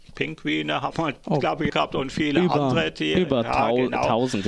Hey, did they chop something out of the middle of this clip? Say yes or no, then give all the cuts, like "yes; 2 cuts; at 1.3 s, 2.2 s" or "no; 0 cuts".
yes; 2 cuts; at 0.9 s, 1.7 s